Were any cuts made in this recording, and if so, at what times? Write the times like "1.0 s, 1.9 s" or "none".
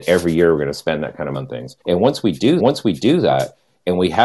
1.3 s, 1.8 s, 2.6 s